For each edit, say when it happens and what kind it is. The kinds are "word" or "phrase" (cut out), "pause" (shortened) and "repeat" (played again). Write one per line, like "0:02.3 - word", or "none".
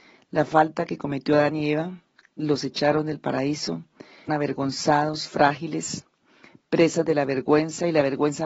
0:04.3 - word